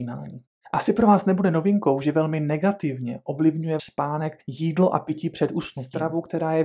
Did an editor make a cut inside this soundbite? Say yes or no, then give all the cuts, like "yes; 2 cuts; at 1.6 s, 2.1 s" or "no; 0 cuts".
yes; 2 cuts; at 3.8 s, 4.4 s